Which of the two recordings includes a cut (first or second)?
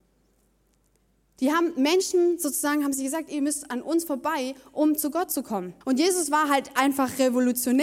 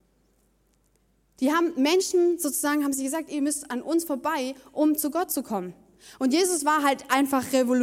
first